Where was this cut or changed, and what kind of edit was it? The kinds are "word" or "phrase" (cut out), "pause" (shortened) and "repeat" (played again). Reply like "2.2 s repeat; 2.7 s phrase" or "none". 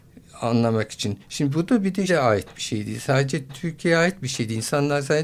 2.1 s word; 3.5 s word